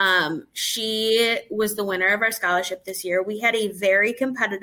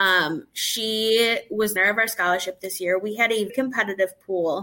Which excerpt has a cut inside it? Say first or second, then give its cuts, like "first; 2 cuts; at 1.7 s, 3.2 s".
second; 2 cuts; at 1.8 s, 3.5 s